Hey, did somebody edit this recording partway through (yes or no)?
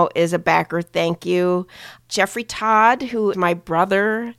yes